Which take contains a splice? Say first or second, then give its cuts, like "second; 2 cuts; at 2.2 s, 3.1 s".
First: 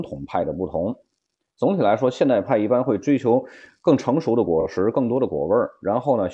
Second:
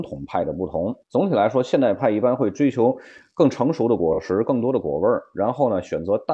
second; 1 cut; at 1.0 s